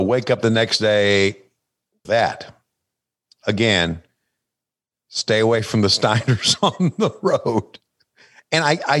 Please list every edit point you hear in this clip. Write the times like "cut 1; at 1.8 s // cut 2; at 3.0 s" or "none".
cut 1; at 2.0 s